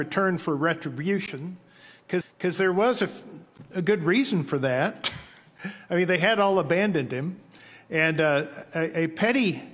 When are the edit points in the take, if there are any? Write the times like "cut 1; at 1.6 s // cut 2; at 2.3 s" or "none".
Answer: cut 1; at 2.2 s